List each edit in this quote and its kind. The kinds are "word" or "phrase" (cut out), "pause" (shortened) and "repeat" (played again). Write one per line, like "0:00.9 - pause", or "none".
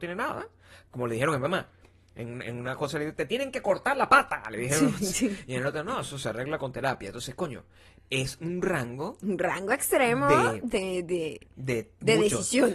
none